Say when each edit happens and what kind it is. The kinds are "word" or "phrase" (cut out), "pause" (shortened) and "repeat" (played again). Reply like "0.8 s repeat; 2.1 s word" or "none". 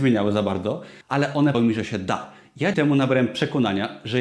1.0 s pause; 1.5 s word; 2.7 s word